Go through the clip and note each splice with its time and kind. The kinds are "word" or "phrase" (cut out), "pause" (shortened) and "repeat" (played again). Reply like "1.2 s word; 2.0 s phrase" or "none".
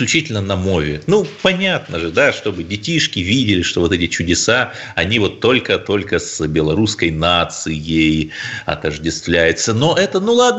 none